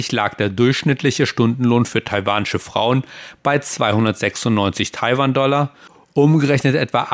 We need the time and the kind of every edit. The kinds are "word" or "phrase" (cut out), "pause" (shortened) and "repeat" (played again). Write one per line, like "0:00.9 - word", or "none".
none

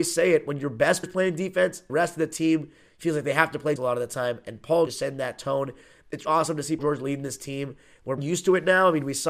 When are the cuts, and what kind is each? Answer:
0:01.0 - word
0:01.9 - word
0:03.8 - word
0:04.9 - word
0:06.2 - word
0:06.8 - word
0:08.2 - word

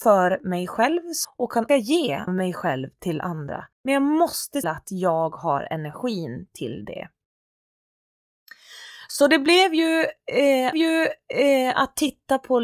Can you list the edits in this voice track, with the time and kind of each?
0:01.2 - phrase
0:01.7 - word
0:02.3 - word
0:03.7 - pause
0:04.6 - phrase
0:10.7 - repeat

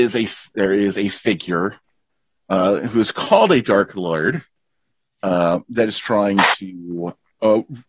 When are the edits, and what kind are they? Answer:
none

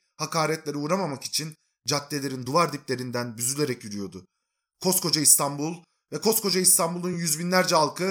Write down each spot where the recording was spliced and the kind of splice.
none

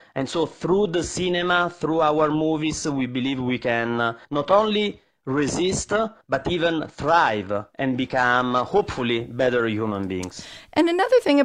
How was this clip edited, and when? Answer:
0:04.2 - pause
0:06.2 - pause

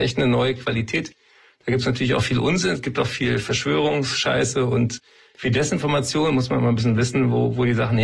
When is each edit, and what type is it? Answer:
none

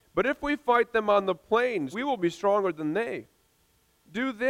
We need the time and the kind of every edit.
0:01.9 - word

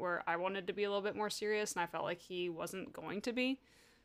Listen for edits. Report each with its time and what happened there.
none

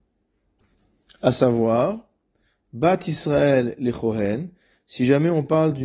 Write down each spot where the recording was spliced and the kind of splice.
none

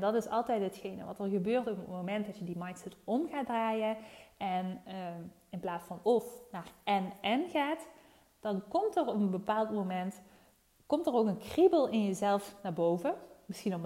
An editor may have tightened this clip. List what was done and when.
0:06.0 - word

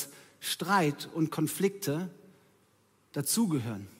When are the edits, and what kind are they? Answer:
none

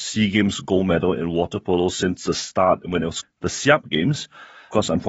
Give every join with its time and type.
0:03.2 - phrase

